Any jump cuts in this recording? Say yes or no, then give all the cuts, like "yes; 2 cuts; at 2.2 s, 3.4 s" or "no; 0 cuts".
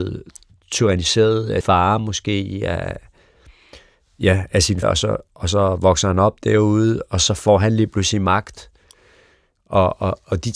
yes; 2 cuts; at 1.6 s, 4.8 s